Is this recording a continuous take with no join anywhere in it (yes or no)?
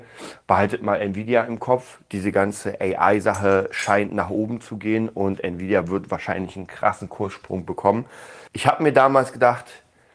no